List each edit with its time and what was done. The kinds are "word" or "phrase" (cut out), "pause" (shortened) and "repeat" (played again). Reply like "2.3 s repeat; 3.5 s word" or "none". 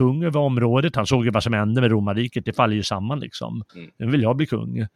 3.7 s pause